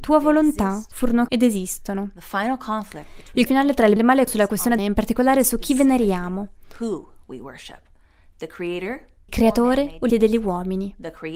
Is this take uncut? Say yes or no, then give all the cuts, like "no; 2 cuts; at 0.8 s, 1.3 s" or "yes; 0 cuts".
no; 7 cuts; at 1.3 s, 3.5 s, 4.0 s, 4.3 s, 4.8 s, 9.3 s, 10.1 s